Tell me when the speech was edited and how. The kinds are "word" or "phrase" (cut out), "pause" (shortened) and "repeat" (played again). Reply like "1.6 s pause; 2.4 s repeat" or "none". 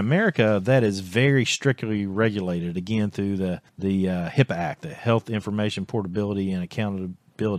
3.7 s pause